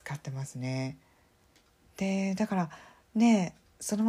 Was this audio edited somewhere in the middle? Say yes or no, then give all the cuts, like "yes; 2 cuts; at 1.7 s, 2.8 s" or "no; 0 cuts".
no; 0 cuts